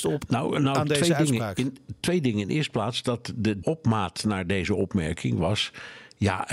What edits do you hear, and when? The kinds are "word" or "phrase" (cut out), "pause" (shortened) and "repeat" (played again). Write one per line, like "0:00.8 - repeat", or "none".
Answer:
0:03.6 - phrase